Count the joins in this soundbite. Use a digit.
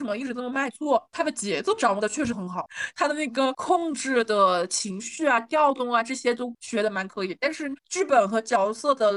1